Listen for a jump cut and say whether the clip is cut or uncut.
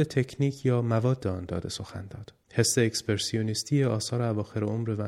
cut